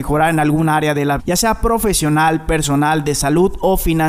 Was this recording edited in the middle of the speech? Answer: yes; 1 cut; at 1.2 s

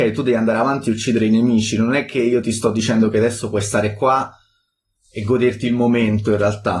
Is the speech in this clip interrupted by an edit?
no; 0 cuts

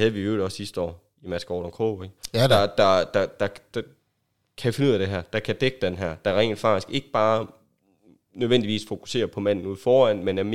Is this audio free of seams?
yes; 0 cuts

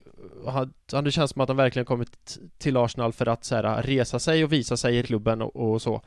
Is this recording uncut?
no; 1 cut; at 5.0 s

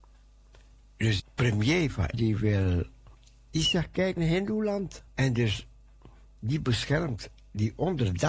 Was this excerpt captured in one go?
no; 5 cuts; at 1.2 s, 2.1 s, 3.1 s, 4.2 s, 5.1 s

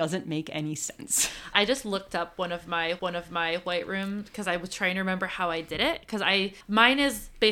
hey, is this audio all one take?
no; 3 cuts; at 1.5 s, 3.0 s, 6.6 s

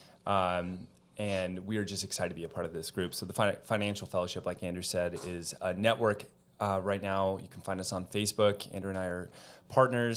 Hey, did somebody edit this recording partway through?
no; 0 cuts

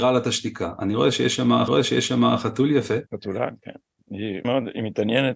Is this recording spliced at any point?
yes; 3 cuts; at 1.7 s, 3.1 s, 4.4 s

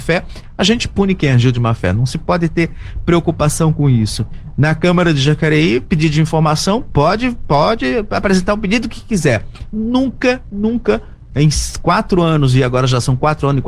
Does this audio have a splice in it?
no; 0 cuts

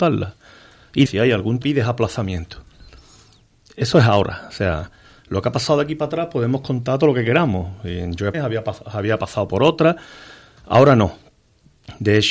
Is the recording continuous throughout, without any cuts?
no; 3 cuts; at 1.1 s, 1.6 s, 8.3 s

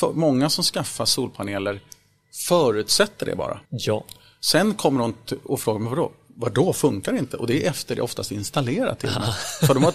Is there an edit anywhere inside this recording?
yes; 1 cut; at 3.6 s

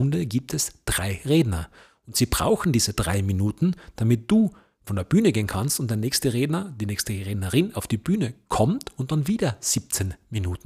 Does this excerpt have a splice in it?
no; 0 cuts

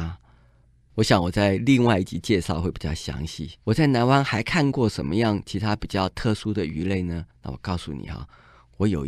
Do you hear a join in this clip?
yes; 2 cuts; at 3.6 s, 7.3 s

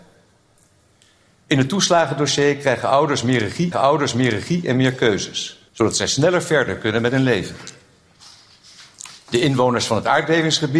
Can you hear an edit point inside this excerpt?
yes; 2 cuts; at 3.7 s, 5.7 s

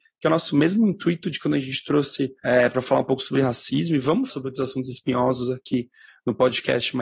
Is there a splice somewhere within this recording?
yes; 2 cuts; at 2.4 s, 4.3 s

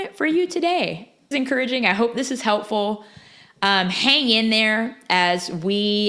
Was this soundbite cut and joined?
yes; 1 cut; at 1.3 s

